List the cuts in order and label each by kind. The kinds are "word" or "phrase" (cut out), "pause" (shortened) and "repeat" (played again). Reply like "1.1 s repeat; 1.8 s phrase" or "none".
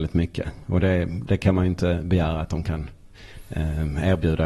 none